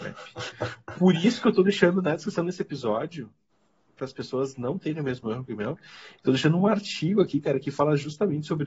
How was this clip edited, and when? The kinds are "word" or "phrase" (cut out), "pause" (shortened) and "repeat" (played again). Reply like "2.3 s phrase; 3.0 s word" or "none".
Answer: none